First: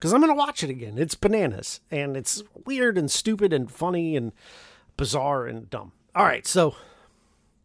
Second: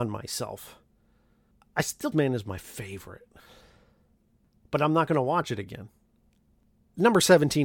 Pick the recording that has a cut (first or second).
second